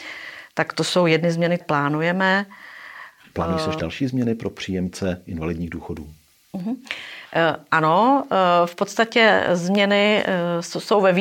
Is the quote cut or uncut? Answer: cut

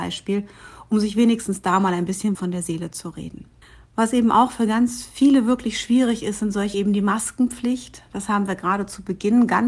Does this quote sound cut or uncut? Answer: cut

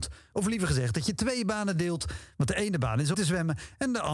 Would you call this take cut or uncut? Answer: cut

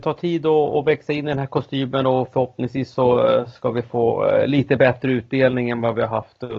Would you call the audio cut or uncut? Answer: uncut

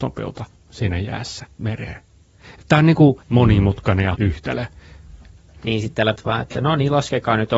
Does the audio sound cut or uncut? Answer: cut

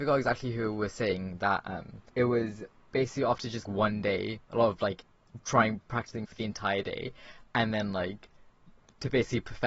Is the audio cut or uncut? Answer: cut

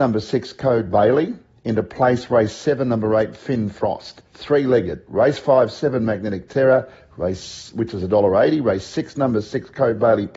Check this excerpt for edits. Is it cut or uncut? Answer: cut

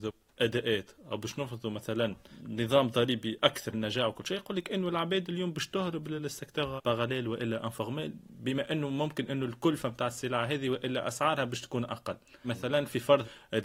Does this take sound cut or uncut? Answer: uncut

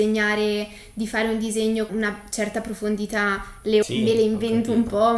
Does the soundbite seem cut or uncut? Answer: cut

